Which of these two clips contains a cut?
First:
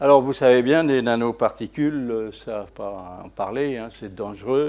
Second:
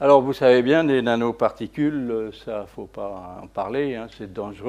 first; 1 cut; at 2.7 s

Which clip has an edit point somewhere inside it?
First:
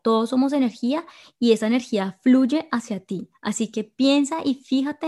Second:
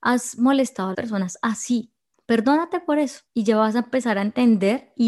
second; 3 cuts; at 0.9 s, 2.1 s, 3.3 s

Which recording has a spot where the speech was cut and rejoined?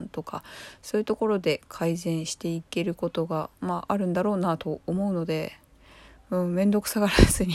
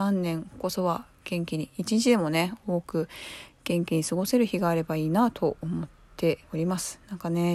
second; 1 cut; at 6.4 s

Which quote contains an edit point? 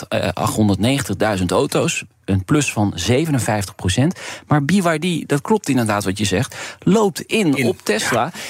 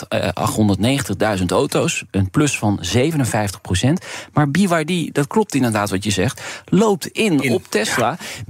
second; 1 cut; at 2.1 s

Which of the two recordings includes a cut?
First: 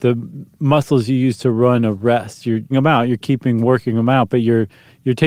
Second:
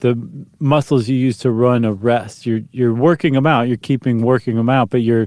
first; 1 cut; at 2.7 s

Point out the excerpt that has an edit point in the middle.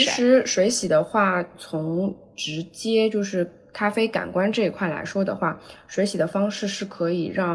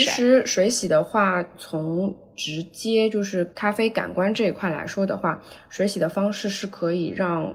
second; 1 cut; at 3.5 s

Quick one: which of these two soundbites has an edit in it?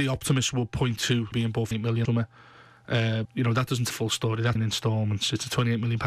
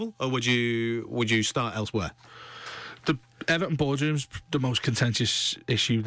first; 6 cuts; at 1.3 s, 1.7 s, 2.0 s, 3.2 s, 3.9 s, 4.6 s

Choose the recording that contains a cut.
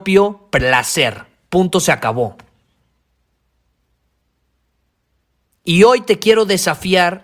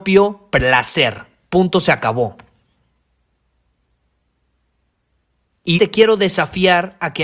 second; 1 cut; at 5.8 s

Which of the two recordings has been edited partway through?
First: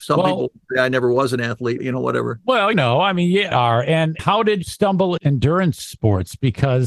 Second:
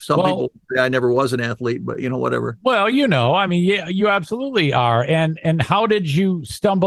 first; 6 cuts; at 1.8 s, 2.7 s, 3.5 s, 4.2 s, 4.6 s, 5.2 s

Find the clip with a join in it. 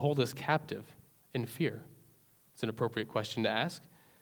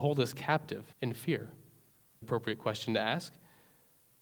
second; 2 cuts; at 0.9 s, 2.2 s

